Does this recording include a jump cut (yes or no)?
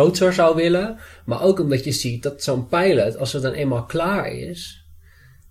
no